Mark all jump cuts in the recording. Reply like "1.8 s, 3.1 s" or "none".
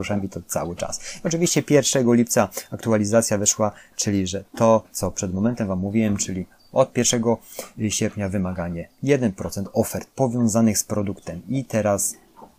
none